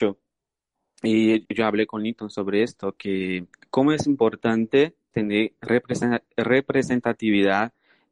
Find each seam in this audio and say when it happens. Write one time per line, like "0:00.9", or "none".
0:01.4
0:03.5
0:05.1